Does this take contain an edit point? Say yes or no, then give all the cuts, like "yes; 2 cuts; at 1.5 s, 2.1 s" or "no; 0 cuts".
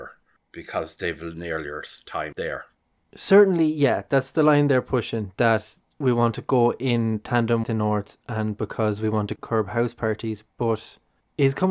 yes; 2 cuts; at 2.3 s, 7.6 s